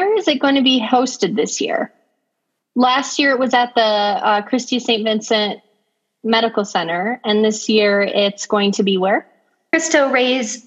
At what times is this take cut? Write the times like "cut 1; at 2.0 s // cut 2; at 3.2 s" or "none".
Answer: none